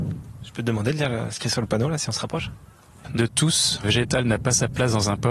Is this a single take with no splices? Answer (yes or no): no